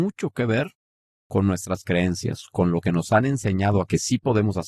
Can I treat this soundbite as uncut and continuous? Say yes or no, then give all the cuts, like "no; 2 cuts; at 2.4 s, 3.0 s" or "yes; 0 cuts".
yes; 0 cuts